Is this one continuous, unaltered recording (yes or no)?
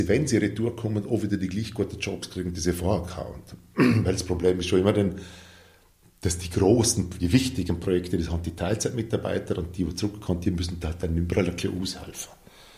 yes